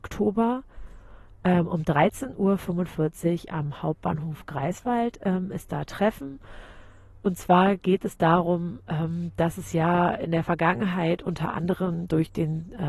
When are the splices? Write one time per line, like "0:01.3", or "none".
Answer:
none